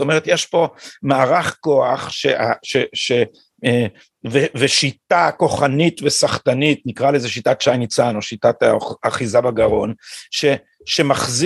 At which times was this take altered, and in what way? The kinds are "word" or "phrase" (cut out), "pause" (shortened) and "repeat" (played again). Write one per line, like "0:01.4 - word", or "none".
none